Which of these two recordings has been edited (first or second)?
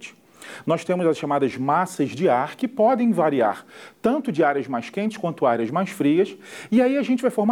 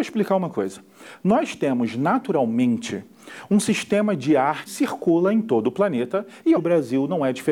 second